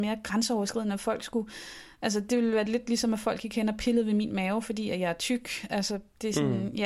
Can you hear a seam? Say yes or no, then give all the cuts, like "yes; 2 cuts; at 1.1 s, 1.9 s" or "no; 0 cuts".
no; 0 cuts